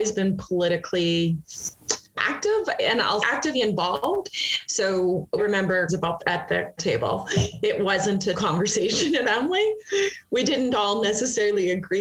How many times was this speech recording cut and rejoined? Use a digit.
9